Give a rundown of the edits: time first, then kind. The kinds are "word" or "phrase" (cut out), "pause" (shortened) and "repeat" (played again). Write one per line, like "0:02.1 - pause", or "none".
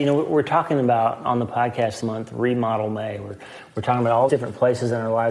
0:02.0 - word
0:04.3 - word